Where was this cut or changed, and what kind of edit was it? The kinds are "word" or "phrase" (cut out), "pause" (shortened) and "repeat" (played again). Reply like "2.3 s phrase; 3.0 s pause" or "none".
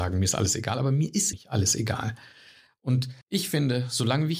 1.3 s word; 3.2 s pause